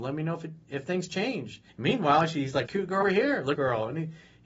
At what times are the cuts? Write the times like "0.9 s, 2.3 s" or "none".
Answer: 1.7 s, 2.7 s, 3.0 s, 3.5 s